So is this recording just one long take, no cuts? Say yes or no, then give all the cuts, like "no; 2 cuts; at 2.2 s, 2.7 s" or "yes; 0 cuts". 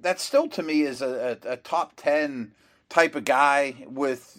yes; 0 cuts